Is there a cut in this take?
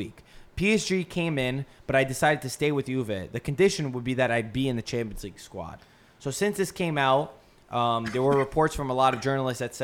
no; 0 cuts

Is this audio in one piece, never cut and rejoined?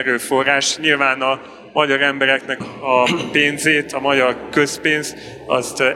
no; 1 cut; at 2.6 s

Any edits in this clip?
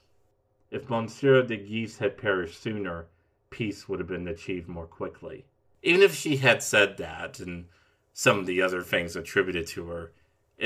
no; 0 cuts

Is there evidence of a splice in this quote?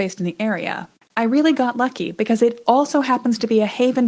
no; 0 cuts

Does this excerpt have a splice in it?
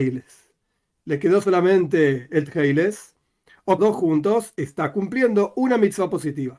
yes; 1 cut; at 3.8 s

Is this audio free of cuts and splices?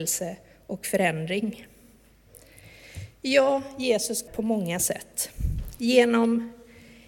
no; 1 cut; at 4.3 s

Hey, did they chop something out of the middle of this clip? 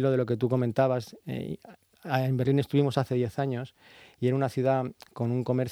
no; 0 cuts

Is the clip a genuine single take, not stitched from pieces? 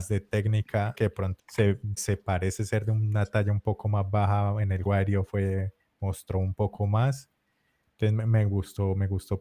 no; 4 cuts; at 0.9 s, 1.4 s, 2.0 s, 4.9 s

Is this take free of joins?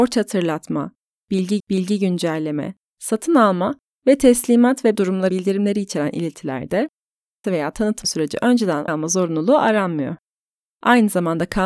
no; 6 cuts; at 1.6 s, 4.9 s, 5.3 s, 7.4 s, 8.0 s, 8.9 s

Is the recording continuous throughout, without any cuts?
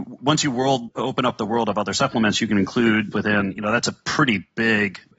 no; 1 cut; at 3.1 s

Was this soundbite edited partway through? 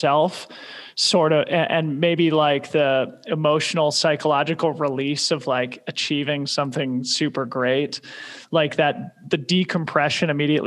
no; 0 cuts

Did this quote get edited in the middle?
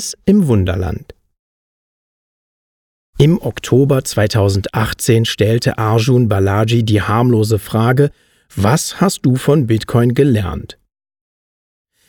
no; 0 cuts

